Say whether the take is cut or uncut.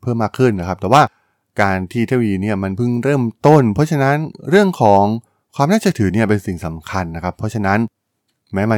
uncut